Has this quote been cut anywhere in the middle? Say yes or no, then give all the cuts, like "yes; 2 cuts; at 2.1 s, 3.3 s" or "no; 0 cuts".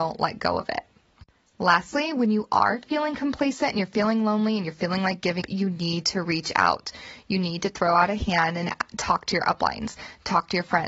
yes; 1 cut; at 5.4 s